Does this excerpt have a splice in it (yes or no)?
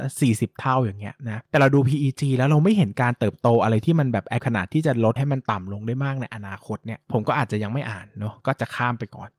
yes